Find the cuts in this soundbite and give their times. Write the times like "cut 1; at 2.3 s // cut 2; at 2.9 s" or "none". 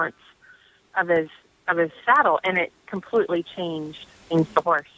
none